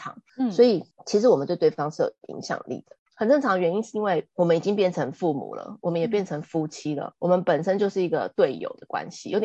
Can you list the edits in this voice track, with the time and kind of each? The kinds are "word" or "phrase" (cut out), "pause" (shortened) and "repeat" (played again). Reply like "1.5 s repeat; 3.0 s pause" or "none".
3.1 s pause; 7.1 s word